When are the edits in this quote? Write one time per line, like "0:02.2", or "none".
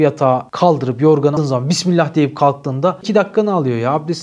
0:01.4
0:03.0